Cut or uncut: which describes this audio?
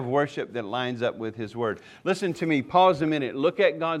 uncut